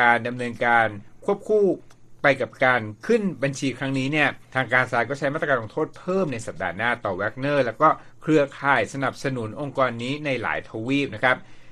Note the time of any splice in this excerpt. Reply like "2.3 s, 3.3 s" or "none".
4.4 s